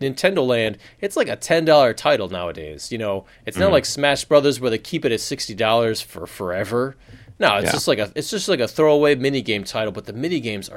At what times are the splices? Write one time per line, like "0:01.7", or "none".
none